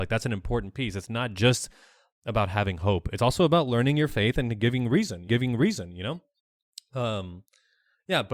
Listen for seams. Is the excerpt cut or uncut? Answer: cut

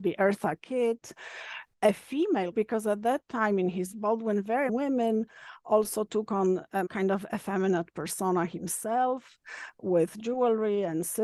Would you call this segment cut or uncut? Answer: cut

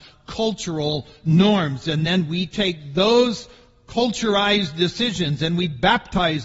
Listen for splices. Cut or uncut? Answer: uncut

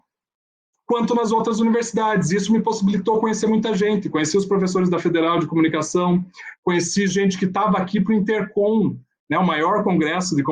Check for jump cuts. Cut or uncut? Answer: uncut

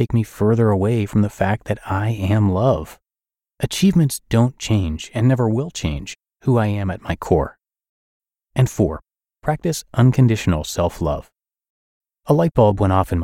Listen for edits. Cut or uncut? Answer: uncut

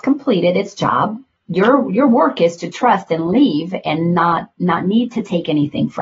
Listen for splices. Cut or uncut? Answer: uncut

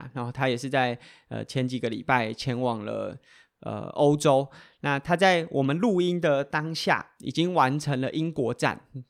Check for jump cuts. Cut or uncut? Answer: uncut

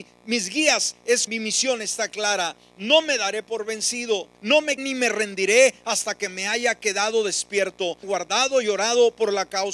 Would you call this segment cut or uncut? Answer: cut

